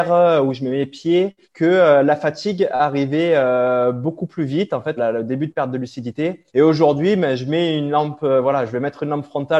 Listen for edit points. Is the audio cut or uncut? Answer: cut